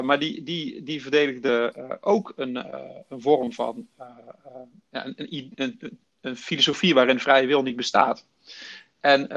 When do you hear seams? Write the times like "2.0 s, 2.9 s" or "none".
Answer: none

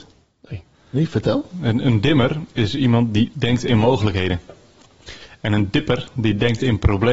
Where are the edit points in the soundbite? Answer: none

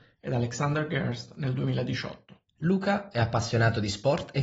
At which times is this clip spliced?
2.5 s

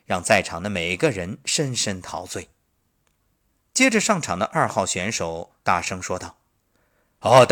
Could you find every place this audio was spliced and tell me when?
5.6 s

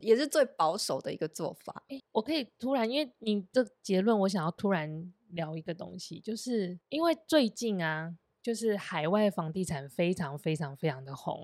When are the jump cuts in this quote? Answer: 2.0 s, 6.8 s

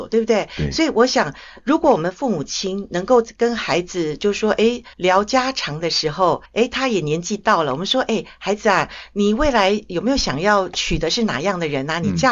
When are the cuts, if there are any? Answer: 4.9 s, 6.5 s

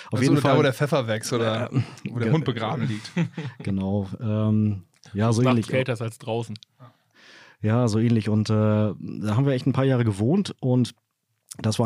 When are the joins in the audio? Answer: none

